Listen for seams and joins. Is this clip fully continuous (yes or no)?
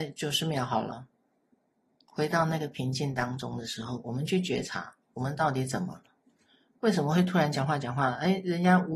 yes